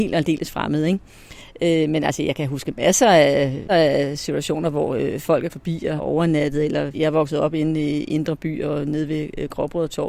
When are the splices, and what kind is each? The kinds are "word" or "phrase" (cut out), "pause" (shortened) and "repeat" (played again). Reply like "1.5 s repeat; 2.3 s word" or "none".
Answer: 3.7 s word; 5.5 s word; 6.0 s word; 6.9 s word